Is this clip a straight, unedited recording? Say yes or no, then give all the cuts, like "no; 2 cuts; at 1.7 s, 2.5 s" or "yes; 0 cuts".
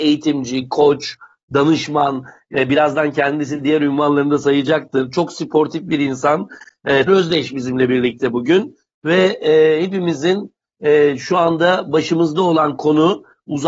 no; 1 cut; at 7.1 s